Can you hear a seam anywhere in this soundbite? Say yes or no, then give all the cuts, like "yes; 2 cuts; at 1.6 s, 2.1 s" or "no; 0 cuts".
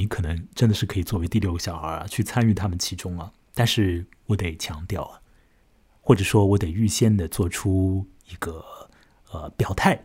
no; 0 cuts